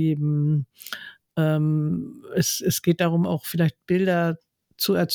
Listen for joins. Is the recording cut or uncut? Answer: uncut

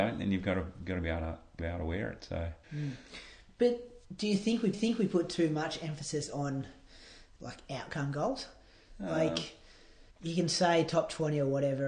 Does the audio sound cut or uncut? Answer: cut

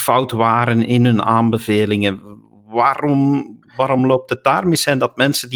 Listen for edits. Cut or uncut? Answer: uncut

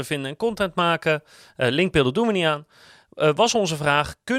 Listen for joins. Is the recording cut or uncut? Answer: uncut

